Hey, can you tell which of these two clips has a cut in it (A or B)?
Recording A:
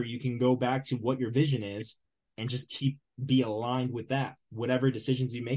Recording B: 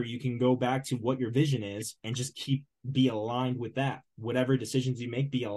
B